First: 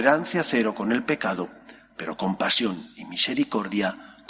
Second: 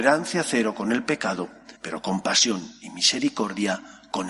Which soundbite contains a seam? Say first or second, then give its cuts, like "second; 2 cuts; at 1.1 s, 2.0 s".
second; 1 cut; at 1.8 s